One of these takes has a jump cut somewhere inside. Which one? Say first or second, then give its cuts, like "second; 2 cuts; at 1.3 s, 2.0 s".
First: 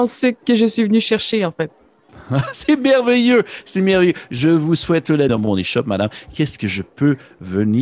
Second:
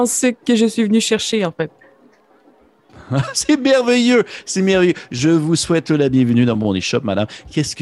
first; 2 cuts; at 1.7 s, 5.3 s